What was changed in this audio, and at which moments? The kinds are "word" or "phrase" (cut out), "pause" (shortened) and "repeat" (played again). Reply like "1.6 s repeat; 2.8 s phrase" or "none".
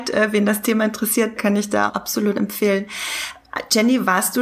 1.4 s word; 1.9 s word